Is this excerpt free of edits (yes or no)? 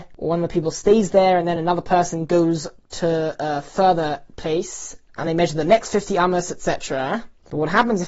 yes